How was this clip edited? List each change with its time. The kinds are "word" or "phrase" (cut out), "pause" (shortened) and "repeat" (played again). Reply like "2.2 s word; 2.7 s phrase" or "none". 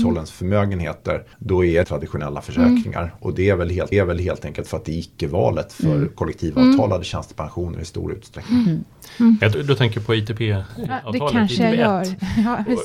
1.3 s pause; 1.8 s phrase; 3.9 s repeat; 9.5 s word